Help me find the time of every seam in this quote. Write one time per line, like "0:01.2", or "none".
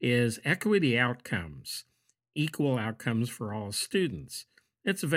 none